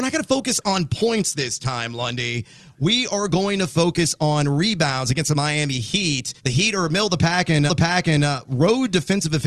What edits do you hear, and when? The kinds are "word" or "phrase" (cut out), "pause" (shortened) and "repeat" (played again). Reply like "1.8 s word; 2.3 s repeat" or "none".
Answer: 6.4 s pause; 7.7 s repeat